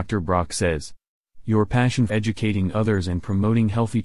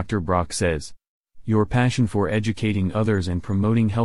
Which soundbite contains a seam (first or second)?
first